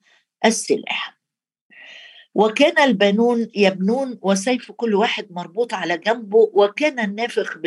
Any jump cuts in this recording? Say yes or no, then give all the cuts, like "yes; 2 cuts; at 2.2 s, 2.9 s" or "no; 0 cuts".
no; 0 cuts